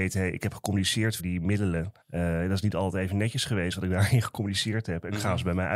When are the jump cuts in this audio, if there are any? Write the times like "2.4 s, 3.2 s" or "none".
1.2 s, 2.0 s